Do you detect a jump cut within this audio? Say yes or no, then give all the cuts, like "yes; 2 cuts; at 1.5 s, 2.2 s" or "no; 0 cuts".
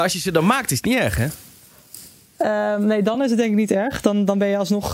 no; 0 cuts